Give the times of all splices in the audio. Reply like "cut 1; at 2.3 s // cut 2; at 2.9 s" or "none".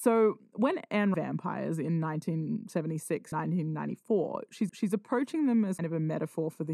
cut 1; at 1.1 s // cut 2; at 3.3 s // cut 3; at 4.7 s // cut 4; at 5.8 s